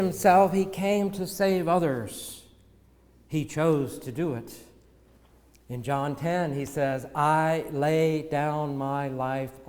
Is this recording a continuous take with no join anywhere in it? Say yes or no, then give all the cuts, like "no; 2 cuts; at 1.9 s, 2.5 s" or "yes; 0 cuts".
yes; 0 cuts